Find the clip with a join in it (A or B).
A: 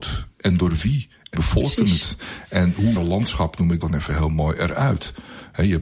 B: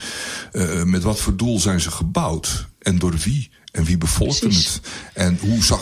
A